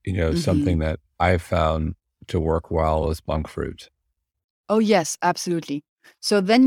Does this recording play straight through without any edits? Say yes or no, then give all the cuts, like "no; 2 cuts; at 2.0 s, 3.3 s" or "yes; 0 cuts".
yes; 0 cuts